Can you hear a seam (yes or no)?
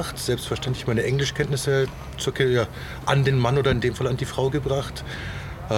no